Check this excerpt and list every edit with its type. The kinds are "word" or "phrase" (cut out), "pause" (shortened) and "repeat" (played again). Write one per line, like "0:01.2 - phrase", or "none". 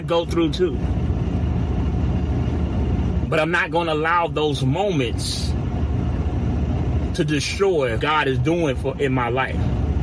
0:08.0 - word